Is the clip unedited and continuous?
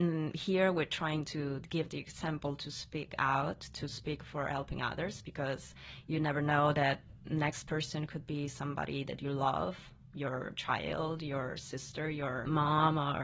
yes; 0 cuts

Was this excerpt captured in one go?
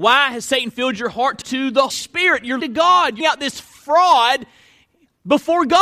no; 4 cuts; at 1.4 s, 1.9 s, 2.6 s, 3.2 s

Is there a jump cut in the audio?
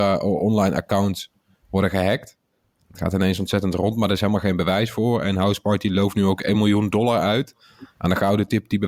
no; 0 cuts

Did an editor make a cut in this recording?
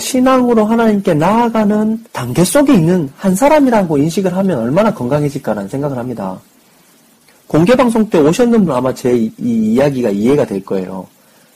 yes; 2 cuts; at 2.1 s, 8.7 s

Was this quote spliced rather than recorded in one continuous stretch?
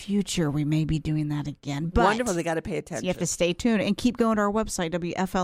no; 0 cuts

